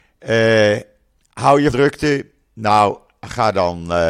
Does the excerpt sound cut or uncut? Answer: cut